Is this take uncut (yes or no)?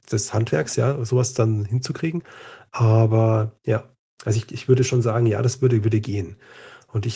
yes